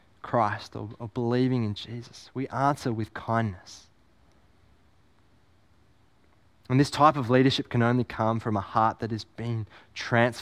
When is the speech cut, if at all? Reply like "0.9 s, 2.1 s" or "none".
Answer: none